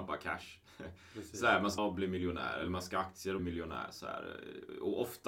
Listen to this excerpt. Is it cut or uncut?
cut